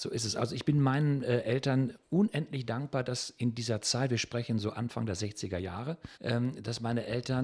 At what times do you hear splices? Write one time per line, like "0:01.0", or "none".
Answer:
0:06.1